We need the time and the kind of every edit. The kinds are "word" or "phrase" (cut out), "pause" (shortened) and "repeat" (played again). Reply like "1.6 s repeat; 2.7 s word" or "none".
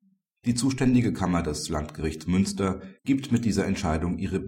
3.0 s pause